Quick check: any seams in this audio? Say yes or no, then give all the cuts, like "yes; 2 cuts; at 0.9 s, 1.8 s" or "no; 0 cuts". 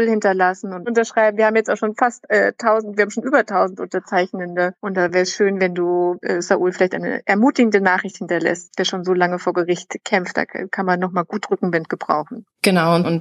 no; 0 cuts